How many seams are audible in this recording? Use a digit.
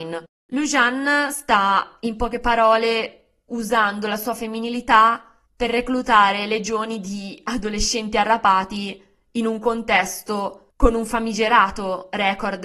2